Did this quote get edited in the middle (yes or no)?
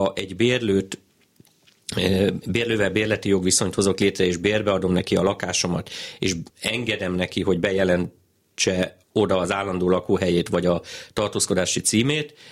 yes